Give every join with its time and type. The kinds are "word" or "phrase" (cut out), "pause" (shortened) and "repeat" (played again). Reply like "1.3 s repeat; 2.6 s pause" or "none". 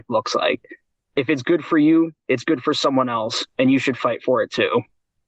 none